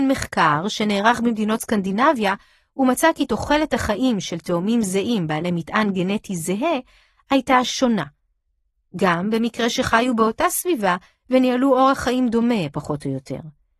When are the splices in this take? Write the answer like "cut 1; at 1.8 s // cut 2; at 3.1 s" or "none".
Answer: none